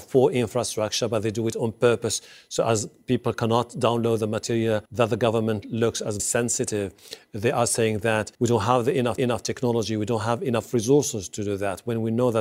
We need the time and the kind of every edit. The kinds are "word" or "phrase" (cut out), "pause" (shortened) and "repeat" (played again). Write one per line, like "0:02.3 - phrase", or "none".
0:04.9 - pause
0:06.2 - word
0:08.3 - pause
0:09.2 - repeat